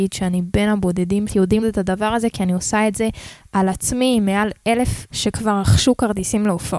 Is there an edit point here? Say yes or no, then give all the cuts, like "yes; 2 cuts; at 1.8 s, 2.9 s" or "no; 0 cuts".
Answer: yes; 3 cuts; at 1.3 s, 1.6 s, 5.1 s